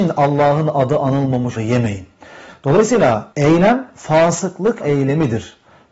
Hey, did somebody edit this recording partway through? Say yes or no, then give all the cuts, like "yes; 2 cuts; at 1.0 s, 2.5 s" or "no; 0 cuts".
yes; 3 cuts; at 1.6 s, 3.3 s, 4.8 s